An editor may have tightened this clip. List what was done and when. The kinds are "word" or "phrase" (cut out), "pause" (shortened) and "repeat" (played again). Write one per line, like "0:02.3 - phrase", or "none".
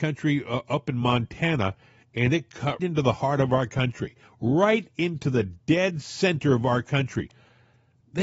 0:02.8 - word